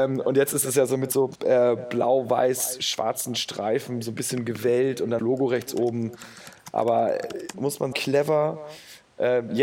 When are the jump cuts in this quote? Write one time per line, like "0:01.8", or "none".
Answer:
0:01.3
0:05.2
0:07.5
0:07.9